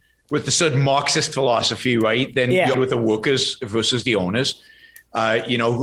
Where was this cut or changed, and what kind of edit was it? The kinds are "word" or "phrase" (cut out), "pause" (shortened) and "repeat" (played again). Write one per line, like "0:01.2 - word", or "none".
0:02.7 - phrase